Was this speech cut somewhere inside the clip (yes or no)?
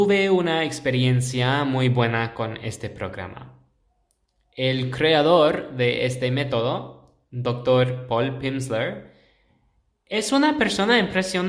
no